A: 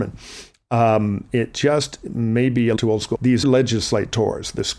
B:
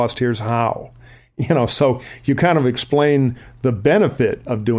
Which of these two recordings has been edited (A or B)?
A